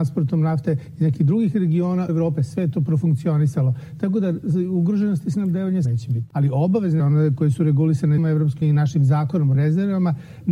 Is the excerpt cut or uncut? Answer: cut